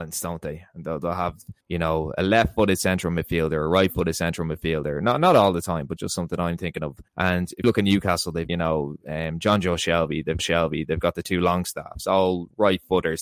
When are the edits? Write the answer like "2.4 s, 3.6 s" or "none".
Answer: 1.6 s, 6.0 s, 7.1 s, 7.6 s, 8.5 s, 10.4 s